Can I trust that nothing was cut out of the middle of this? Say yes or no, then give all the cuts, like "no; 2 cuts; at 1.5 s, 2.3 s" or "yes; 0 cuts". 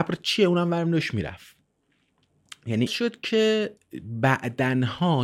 no; 1 cut; at 2.9 s